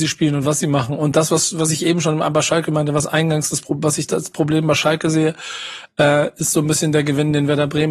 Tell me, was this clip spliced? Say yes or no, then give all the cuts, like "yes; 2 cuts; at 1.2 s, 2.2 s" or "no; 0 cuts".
no; 0 cuts